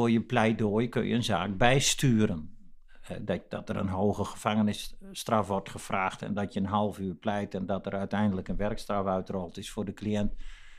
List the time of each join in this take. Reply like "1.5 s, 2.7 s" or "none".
none